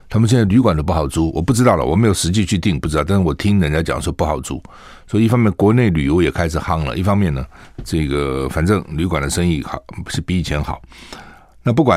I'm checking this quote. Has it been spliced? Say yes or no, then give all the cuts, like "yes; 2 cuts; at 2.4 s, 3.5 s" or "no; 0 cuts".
no; 0 cuts